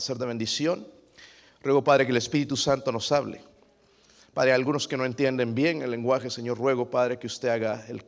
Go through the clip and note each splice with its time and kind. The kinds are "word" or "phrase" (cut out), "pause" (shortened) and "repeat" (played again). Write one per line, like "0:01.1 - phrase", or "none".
none